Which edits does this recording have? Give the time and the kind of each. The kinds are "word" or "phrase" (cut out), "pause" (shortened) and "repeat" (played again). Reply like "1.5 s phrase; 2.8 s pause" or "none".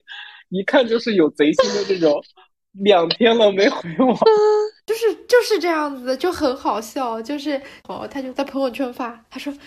none